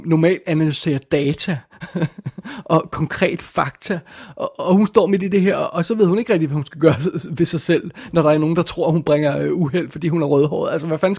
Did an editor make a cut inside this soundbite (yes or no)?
no